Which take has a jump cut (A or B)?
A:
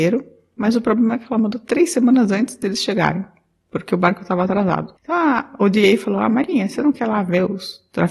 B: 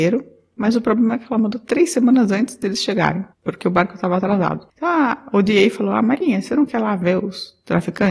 B